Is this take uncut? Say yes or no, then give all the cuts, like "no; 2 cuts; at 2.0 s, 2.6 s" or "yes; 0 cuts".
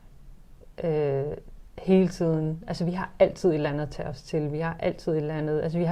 yes; 0 cuts